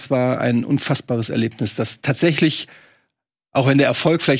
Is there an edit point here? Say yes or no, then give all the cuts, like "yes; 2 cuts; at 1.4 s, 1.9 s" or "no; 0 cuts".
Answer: no; 0 cuts